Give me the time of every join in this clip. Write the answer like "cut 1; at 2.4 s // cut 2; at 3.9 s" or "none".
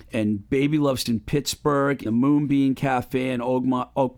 cut 1; at 1.1 s // cut 2; at 2.1 s